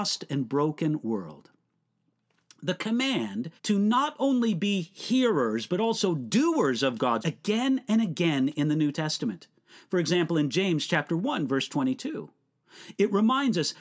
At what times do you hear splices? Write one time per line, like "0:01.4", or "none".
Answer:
0:03.6
0:07.2